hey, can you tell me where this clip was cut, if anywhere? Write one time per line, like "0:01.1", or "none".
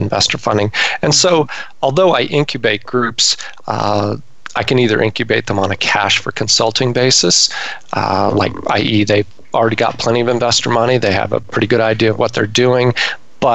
none